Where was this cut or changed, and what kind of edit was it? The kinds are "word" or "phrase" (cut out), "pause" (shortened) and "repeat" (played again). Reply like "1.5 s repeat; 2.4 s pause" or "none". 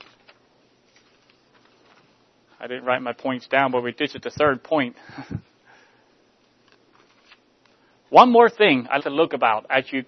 9.0 s word

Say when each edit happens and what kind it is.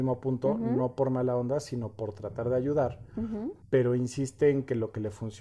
3.6 s pause

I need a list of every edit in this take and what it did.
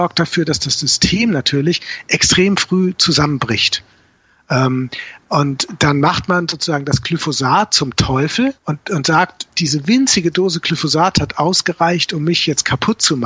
8.6 s pause

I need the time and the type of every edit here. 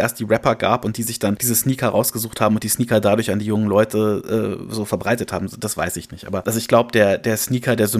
none

